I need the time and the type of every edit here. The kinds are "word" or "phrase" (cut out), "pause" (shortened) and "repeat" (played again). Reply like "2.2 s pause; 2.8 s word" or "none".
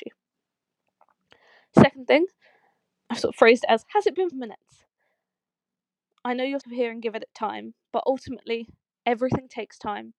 4.3 s word; 6.6 s word